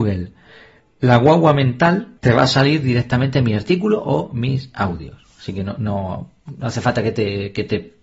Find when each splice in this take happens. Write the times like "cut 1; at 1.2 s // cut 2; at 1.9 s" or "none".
cut 1; at 2.2 s